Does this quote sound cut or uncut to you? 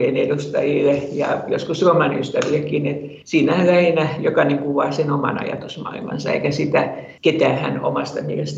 cut